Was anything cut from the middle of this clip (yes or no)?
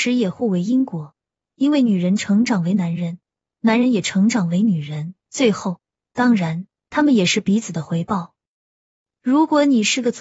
yes